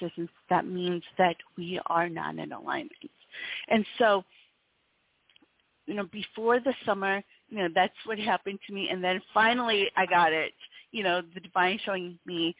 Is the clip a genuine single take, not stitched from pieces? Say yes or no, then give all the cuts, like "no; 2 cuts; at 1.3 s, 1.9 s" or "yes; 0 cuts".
yes; 0 cuts